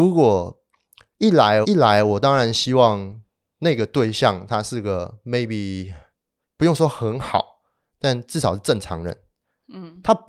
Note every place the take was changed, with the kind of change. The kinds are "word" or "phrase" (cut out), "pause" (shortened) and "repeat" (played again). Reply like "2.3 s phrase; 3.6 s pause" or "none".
1.6 s word